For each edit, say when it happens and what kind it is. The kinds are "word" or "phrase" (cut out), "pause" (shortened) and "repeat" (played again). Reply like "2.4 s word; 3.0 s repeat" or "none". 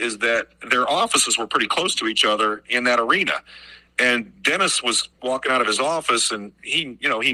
5.1 s pause